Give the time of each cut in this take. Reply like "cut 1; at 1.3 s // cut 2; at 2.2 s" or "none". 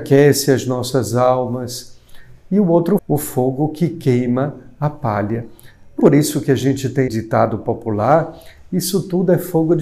cut 1; at 3.0 s // cut 2; at 6.0 s // cut 3; at 7.1 s